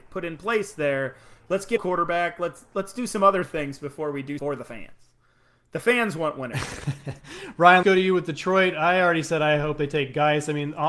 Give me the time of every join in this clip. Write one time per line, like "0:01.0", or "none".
0:01.8
0:02.7
0:04.4
0:07.8